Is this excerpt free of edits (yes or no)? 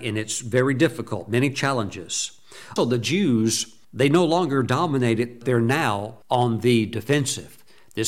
no